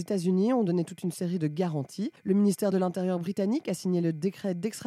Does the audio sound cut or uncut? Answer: uncut